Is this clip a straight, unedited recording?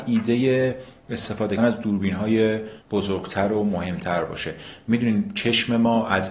no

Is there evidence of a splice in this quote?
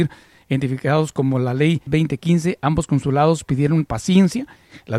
yes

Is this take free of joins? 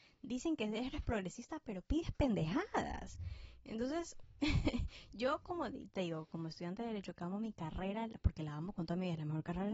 yes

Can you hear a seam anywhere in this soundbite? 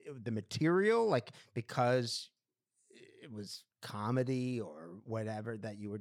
yes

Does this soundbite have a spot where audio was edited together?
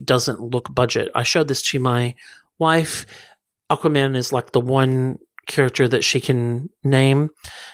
no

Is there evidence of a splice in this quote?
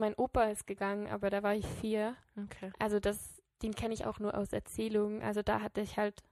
no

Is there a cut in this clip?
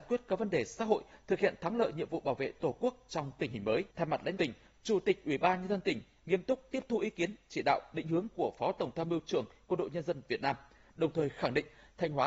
yes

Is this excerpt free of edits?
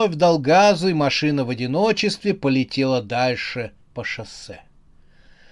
no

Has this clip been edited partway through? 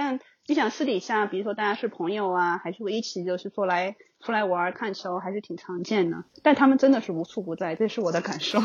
no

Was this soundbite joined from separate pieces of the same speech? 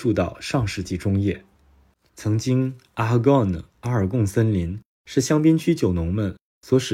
no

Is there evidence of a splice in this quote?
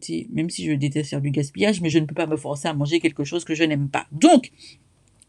no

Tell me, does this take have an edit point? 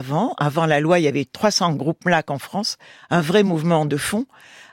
no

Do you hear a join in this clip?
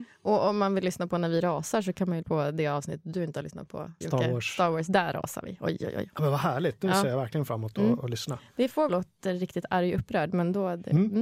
yes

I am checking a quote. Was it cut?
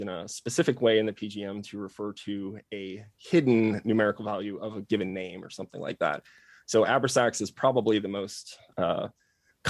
no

